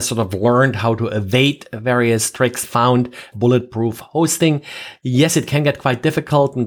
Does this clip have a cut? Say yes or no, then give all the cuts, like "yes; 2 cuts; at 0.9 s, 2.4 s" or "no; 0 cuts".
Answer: yes; 2 cuts; at 2.6 s, 3.3 s